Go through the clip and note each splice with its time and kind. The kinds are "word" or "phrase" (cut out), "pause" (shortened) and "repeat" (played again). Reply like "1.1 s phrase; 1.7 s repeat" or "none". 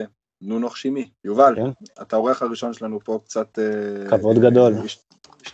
1.2 s pause